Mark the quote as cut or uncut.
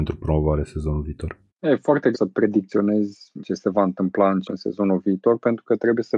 cut